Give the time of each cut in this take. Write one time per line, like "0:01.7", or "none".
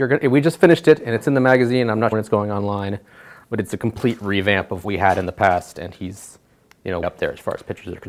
0:02.1
0:04.8
0:07.0